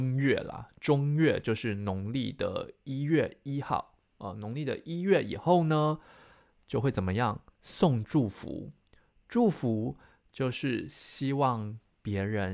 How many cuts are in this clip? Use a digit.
0